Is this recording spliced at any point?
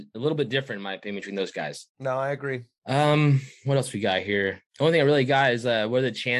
yes; 2 cuts; at 1.9 s, 4.7 s

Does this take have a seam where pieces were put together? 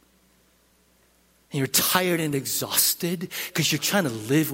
no; 0 cuts

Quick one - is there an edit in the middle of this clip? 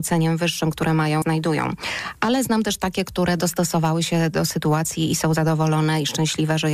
yes; 1 cut; at 1.2 s

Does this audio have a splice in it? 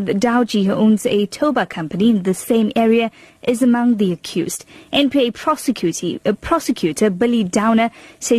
no; 0 cuts

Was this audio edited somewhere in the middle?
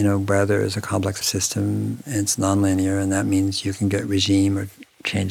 yes; 1 cut; at 1.2 s

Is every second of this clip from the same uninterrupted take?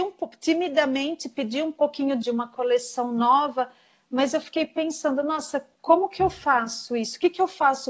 no; 1 cut; at 2.2 s

